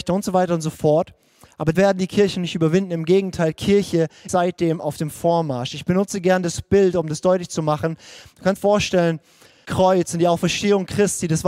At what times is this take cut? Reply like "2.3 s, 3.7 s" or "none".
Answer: 1.7 s, 4.3 s, 8.6 s, 9.6 s